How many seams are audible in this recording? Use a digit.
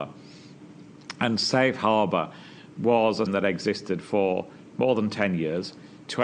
1